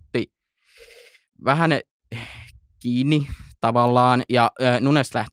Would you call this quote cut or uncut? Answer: uncut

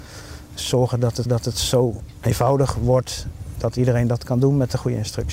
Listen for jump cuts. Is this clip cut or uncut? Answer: cut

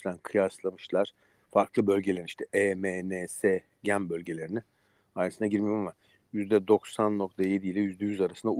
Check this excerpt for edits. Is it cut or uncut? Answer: uncut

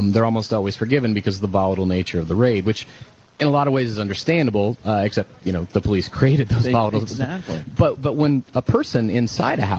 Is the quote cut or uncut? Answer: uncut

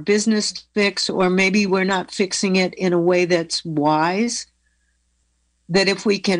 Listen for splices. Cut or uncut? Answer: uncut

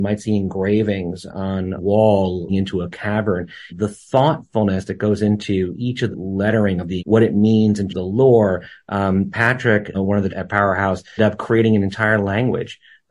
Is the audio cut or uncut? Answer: cut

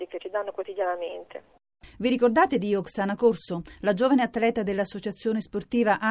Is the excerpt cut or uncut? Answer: uncut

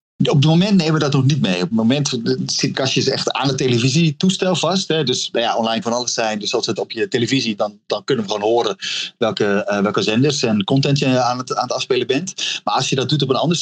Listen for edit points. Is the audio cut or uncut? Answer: cut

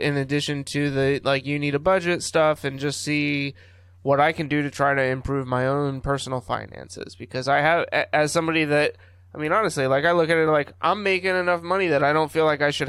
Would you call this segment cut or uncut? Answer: uncut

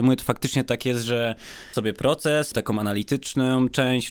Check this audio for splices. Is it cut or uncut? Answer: cut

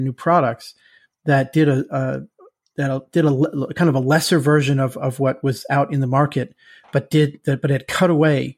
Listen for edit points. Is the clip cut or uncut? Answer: uncut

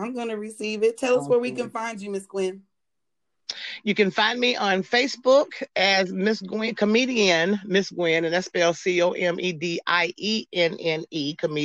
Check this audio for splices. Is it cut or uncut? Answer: uncut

